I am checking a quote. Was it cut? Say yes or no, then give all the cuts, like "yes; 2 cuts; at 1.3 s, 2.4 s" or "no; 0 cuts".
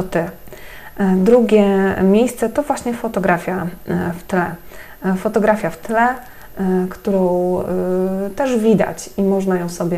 no; 0 cuts